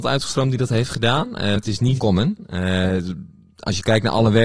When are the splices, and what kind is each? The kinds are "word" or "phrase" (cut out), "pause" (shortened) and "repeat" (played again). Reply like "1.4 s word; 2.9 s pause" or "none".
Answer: 1.6 s word; 2.0 s word